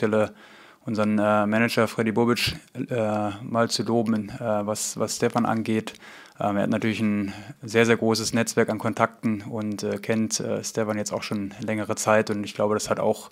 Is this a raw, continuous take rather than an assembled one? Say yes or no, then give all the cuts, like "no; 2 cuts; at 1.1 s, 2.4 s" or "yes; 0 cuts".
yes; 0 cuts